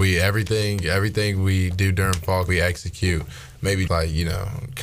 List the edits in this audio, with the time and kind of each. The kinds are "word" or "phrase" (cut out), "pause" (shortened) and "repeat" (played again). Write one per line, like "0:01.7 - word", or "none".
0:02.5 - word
0:03.9 - word